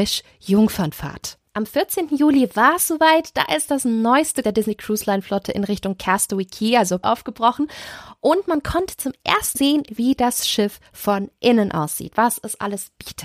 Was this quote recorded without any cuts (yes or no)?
no